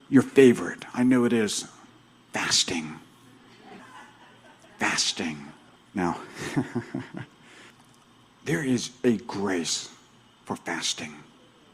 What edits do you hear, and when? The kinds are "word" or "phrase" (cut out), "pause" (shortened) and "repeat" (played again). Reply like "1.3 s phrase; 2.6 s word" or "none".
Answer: 1.9 s pause; 5.8 s pause